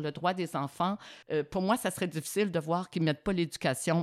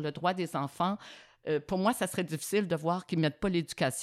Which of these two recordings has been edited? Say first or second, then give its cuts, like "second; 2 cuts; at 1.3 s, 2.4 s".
first; 1 cut; at 1.2 s